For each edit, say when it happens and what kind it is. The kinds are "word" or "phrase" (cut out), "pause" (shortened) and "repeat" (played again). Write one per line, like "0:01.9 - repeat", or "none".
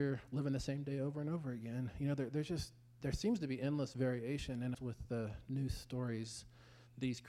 0:04.7 - phrase